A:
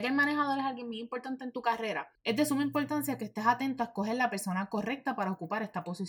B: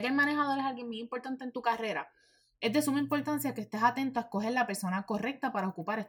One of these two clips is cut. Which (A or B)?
A